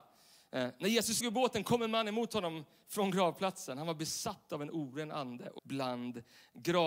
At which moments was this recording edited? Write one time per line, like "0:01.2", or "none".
0:01.2
0:05.6